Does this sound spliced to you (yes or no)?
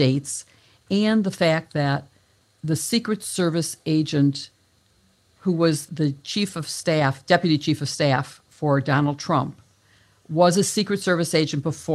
yes